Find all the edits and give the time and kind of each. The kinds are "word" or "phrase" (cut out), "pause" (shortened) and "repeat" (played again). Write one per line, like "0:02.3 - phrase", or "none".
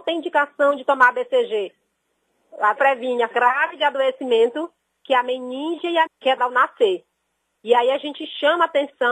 0:02.8 - word
0:03.3 - word
0:06.1 - word
0:06.4 - word